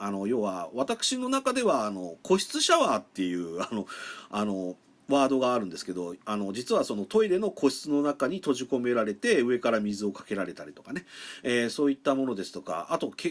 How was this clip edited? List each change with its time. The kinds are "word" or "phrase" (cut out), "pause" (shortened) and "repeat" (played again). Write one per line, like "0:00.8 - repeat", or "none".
0:06.2 - pause